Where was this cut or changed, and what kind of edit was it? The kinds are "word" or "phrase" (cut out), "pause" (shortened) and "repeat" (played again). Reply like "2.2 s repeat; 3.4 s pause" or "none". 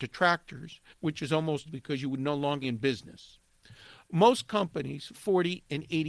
0.9 s pause; 1.7 s word; 2.6 s word; 5.1 s phrase